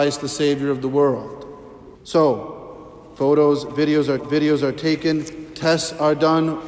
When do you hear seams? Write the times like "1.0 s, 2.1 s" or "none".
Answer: 1.9 s, 4.2 s

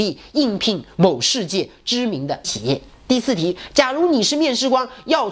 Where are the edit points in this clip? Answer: 2.4 s

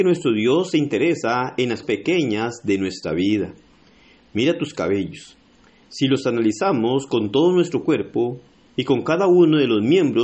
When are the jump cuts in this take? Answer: 1.8 s

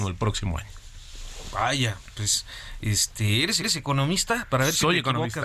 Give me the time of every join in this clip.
3.6 s

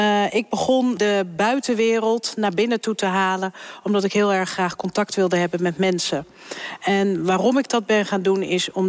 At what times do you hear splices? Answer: none

